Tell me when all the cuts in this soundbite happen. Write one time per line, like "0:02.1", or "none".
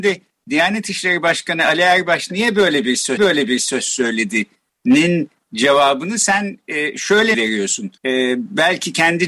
0:03.2
0:07.3
0:08.0